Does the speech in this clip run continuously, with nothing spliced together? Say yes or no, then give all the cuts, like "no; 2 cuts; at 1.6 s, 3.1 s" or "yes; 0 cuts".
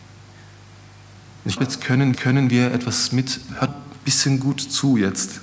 no; 3 cuts; at 1.6 s, 2.1 s, 3.7 s